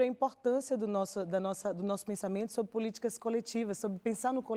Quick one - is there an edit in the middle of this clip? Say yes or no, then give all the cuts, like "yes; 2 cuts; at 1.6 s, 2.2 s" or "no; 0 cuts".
no; 0 cuts